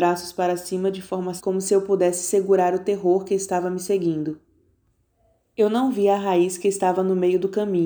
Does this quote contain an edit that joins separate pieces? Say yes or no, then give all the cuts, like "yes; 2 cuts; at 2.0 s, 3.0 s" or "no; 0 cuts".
yes; 1 cut; at 1.4 s